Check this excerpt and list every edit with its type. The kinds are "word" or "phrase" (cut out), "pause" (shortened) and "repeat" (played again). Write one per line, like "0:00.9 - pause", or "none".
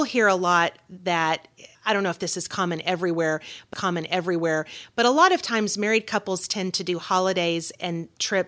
0:01.7 - pause
0:03.7 - repeat